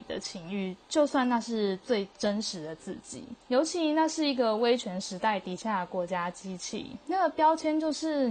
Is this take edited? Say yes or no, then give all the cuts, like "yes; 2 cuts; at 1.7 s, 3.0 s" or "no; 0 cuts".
yes; 1 cut; at 3.4 s